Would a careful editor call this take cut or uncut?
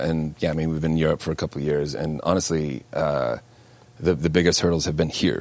uncut